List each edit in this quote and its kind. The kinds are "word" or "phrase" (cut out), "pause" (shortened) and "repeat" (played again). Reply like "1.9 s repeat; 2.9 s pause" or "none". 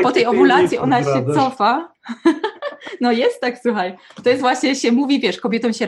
none